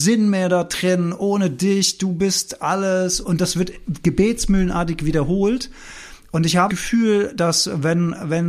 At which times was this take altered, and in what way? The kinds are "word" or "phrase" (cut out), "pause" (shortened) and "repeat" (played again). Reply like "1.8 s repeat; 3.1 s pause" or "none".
3.2 s word; 6.7 s word